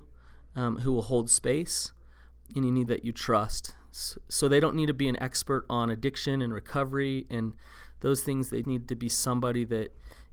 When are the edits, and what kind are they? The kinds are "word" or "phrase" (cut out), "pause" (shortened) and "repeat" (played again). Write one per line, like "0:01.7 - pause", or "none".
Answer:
0:02.9 - word
0:08.6 - word